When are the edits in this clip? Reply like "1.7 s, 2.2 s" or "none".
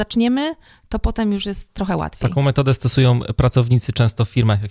none